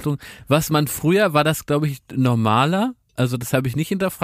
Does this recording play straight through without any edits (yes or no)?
yes